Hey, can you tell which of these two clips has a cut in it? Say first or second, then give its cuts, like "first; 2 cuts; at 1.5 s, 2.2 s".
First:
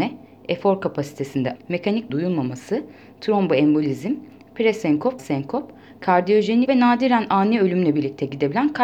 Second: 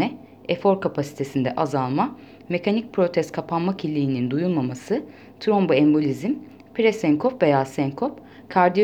first; 4 cuts; at 1.6 s, 2.1 s, 5.2 s, 6.7 s